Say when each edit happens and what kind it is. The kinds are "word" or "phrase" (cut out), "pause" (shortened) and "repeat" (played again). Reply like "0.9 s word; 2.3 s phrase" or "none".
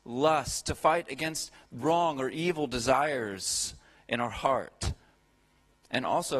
none